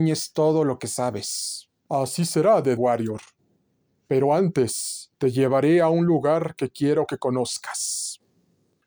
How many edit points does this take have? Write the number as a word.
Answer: four